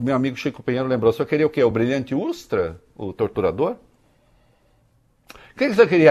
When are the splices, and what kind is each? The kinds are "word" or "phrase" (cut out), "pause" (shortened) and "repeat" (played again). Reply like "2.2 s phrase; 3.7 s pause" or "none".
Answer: none